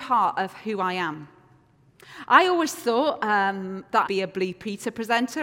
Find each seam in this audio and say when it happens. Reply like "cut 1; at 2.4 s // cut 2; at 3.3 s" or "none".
cut 1; at 4.0 s